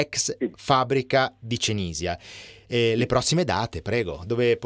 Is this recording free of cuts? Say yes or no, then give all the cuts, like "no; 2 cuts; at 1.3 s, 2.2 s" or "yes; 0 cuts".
yes; 0 cuts